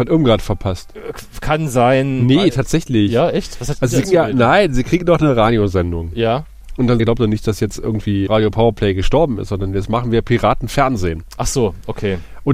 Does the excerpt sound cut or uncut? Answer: cut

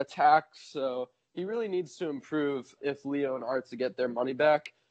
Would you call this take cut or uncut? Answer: cut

